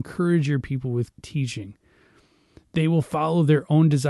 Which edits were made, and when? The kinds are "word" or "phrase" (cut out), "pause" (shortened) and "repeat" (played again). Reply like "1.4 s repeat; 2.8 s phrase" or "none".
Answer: 1.1 s word